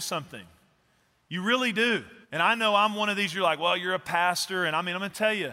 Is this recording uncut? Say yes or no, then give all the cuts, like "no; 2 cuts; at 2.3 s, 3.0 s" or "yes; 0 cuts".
no; 1 cut; at 2.2 s